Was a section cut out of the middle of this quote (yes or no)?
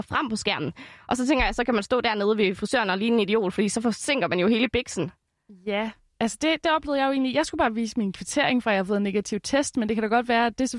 no